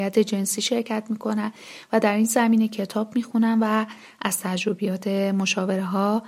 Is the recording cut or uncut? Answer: uncut